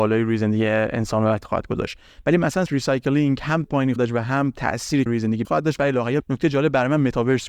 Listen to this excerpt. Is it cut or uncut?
cut